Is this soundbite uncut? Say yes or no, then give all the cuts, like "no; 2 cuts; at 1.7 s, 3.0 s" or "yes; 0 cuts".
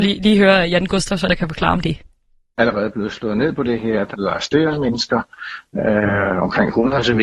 no; 3 cuts; at 1.3 s, 2.6 s, 4.1 s